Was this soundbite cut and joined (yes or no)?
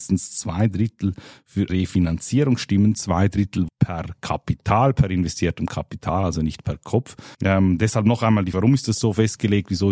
yes